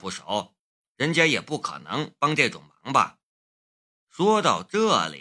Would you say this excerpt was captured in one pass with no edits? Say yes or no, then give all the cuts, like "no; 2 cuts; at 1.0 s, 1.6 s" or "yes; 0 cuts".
yes; 0 cuts